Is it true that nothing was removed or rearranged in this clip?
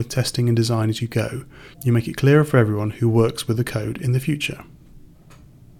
yes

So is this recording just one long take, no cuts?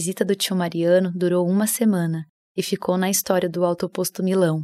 yes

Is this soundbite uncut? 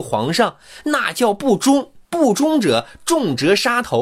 no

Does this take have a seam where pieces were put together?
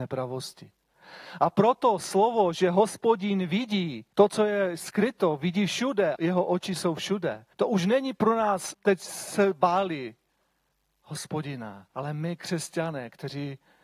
yes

